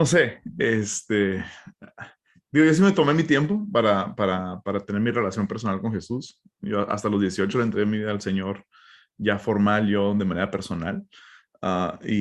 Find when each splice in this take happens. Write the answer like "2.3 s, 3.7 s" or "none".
none